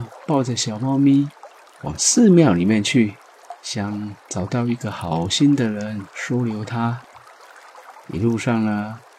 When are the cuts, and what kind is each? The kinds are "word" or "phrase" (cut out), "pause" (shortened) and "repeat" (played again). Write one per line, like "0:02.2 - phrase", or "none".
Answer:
0:01.6 - pause
0:03.6 - pause